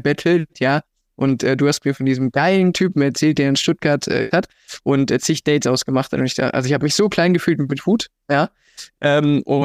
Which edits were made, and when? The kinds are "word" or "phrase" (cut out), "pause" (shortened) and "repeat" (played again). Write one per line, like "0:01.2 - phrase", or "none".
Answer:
0:04.3 - phrase